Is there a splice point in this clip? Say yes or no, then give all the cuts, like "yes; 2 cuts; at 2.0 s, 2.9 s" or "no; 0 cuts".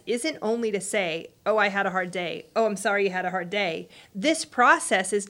no; 0 cuts